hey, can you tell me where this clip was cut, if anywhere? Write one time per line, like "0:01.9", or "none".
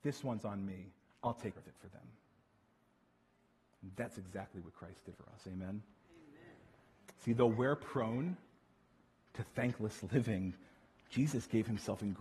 0:01.5
0:05.1